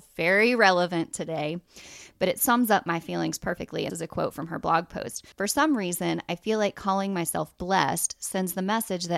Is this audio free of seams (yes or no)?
no